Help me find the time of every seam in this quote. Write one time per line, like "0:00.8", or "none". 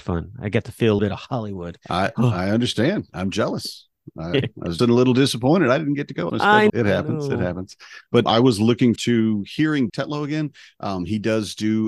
0:01.0
0:04.4
0:04.8
0:06.3
0:06.7
0:08.3
0:09.0
0:09.9